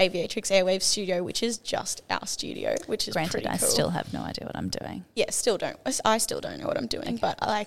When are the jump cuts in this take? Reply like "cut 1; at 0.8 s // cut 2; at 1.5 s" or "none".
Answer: none